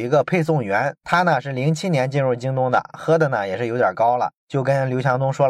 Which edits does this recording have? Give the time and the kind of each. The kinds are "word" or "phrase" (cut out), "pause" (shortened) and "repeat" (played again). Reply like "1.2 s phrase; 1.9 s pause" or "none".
4.4 s pause